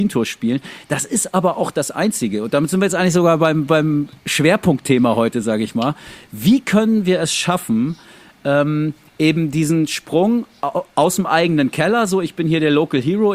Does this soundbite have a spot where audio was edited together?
no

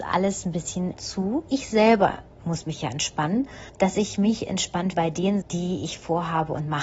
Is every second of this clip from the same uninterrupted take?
no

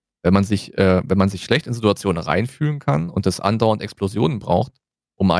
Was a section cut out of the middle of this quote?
no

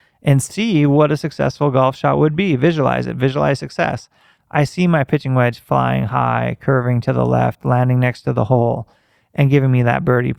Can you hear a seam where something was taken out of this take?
no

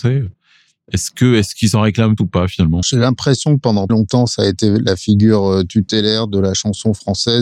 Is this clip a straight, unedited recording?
no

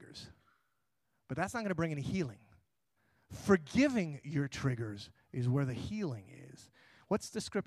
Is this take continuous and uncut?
no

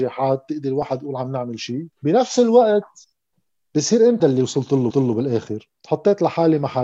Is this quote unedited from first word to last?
no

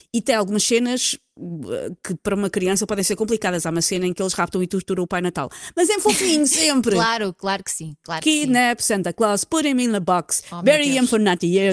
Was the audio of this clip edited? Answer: no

